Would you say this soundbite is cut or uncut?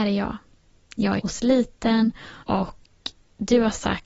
cut